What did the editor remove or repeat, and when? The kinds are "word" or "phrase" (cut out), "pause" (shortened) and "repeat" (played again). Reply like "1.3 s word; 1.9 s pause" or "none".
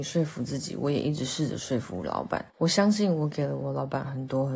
2.5 s pause